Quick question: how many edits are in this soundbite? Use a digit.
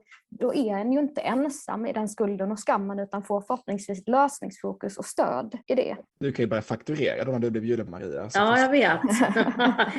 3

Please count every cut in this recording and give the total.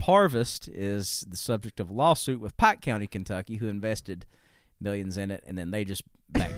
0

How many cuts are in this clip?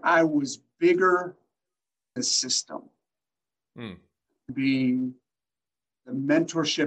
2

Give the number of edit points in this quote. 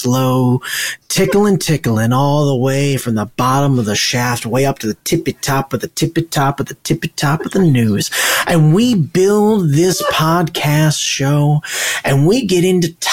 0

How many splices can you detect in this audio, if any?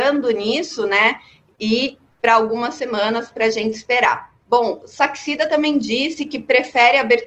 2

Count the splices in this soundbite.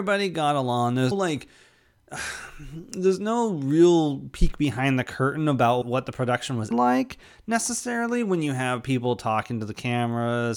3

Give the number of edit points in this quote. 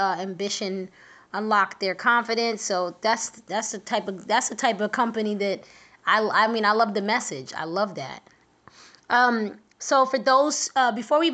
1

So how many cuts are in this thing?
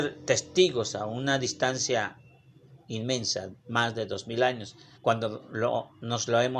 1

